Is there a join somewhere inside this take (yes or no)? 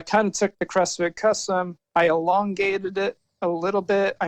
yes